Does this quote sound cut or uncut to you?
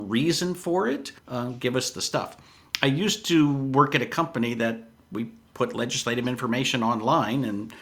cut